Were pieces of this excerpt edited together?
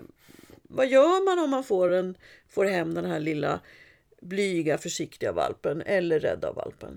no; 0 cuts

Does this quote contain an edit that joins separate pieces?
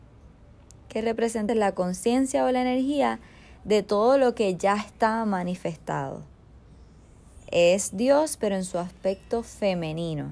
yes; 1 cut; at 1.5 s

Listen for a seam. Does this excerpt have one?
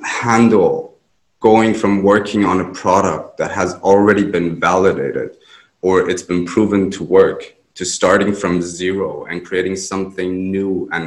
no; 0 cuts

